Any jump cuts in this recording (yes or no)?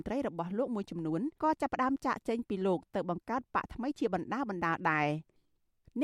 yes